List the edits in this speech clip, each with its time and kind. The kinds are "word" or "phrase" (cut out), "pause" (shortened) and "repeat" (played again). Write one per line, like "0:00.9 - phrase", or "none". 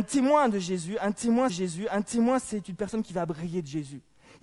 0:01.5 - repeat